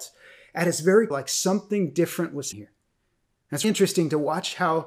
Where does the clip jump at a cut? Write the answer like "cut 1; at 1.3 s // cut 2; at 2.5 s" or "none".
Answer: cut 1; at 1.1 s // cut 2; at 2.5 s // cut 3; at 3.6 s